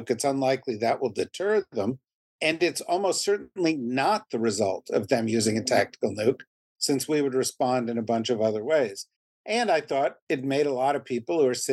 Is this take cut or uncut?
uncut